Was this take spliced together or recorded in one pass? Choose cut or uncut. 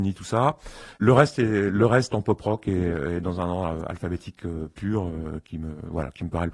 cut